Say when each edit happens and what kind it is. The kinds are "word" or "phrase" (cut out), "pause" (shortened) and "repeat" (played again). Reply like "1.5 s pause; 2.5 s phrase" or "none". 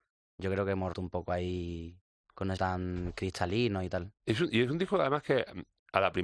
0.9 s word; 2.2 s pause; 2.6 s word